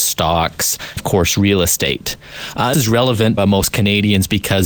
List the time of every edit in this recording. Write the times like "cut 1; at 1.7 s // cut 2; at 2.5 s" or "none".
cut 1; at 1.0 s // cut 2; at 2.7 s // cut 3; at 3.4 s